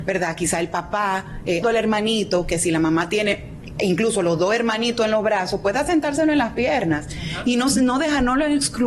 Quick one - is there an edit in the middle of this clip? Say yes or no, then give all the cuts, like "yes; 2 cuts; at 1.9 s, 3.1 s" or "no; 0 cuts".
yes; 1 cut; at 1.6 s